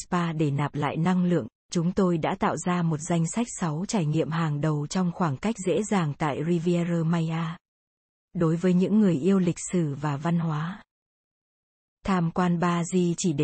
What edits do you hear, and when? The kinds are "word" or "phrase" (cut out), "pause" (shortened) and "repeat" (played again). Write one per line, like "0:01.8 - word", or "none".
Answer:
none